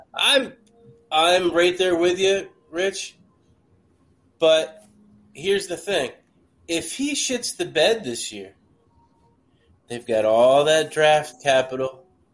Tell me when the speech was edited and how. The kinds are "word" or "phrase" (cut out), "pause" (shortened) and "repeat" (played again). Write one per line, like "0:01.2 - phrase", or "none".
none